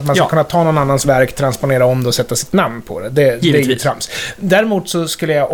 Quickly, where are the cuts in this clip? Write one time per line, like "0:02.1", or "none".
none